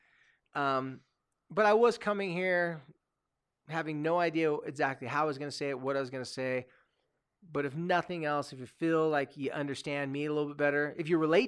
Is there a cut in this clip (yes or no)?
no